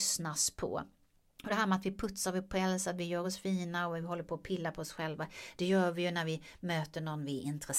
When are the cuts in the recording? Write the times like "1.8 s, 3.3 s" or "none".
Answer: none